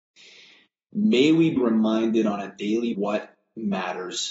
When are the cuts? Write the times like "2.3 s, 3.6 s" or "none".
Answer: 1.6 s, 2.9 s